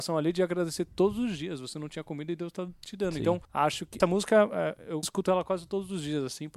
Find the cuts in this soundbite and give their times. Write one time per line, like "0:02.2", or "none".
0:03.4
0:04.0
0:05.0